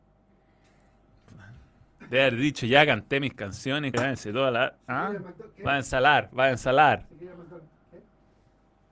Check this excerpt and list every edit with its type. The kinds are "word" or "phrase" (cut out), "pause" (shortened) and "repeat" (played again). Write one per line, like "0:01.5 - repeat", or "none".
0:03.9 - word